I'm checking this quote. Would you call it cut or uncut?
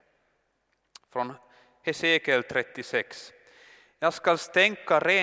uncut